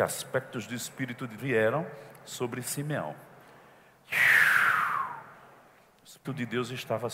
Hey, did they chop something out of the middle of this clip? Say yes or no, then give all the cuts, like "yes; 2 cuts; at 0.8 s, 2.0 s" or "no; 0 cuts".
yes; 2 cuts; at 1.4 s, 6.2 s